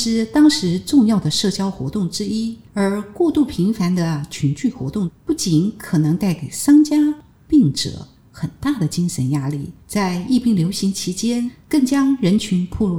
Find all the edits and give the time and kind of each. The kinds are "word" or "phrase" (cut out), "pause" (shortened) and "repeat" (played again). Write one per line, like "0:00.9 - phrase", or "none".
0:02.7 - pause
0:05.2 - pause
0:09.8 - pause